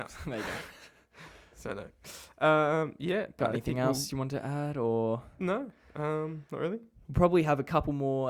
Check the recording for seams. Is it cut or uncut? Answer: uncut